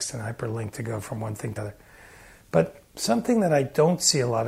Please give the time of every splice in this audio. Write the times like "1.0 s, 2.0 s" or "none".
1.6 s, 2.9 s